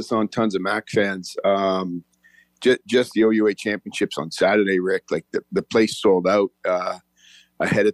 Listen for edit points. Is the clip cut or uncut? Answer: uncut